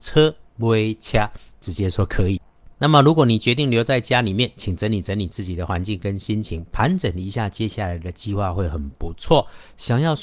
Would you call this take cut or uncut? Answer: cut